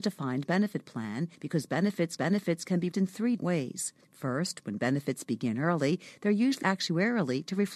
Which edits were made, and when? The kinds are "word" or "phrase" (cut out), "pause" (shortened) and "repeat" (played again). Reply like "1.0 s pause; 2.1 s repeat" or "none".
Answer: 1.3 s pause; 2.2 s repeat; 2.9 s word; 3.4 s word; 4.0 s pause; 6.6 s word